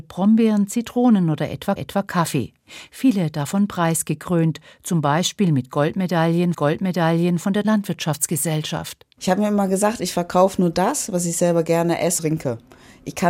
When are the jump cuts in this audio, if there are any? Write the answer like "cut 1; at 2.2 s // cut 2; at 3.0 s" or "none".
cut 1; at 1.8 s // cut 2; at 6.5 s // cut 3; at 7.6 s // cut 4; at 12.2 s

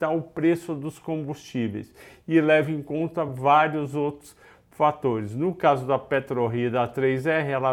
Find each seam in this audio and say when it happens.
none

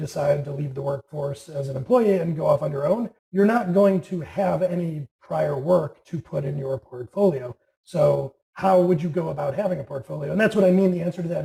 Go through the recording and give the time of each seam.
cut 1; at 3.2 s // cut 2; at 8.4 s

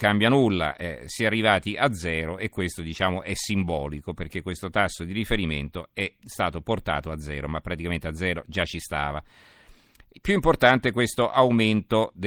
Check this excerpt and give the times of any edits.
none

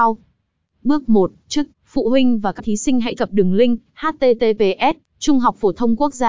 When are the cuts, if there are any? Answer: cut 1; at 1.7 s // cut 2; at 2.6 s // cut 3; at 3.2 s

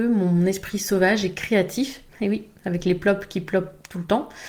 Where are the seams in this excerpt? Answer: cut 1; at 2.1 s

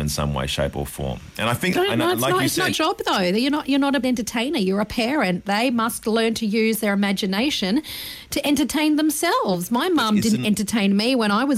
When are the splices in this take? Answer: cut 1; at 1.7 s // cut 2; at 2.7 s // cut 3; at 4.0 s

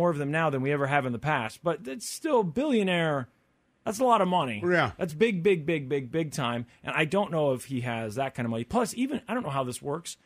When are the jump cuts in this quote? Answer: none

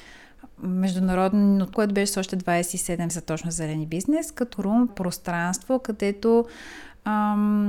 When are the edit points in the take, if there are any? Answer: cut 1; at 1.7 s // cut 2; at 3.1 s // cut 3; at 4.5 s // cut 4; at 4.9 s

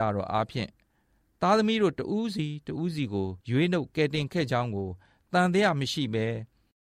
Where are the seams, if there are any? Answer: cut 1; at 3.4 s

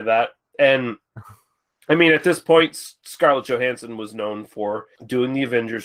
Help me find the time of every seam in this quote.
none

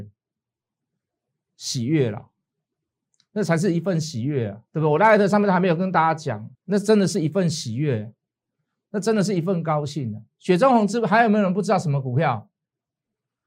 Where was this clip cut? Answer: cut 1; at 4.7 s // cut 2; at 6.5 s

